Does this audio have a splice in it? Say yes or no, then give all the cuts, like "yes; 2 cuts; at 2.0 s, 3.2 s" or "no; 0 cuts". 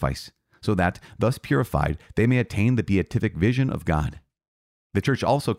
no; 0 cuts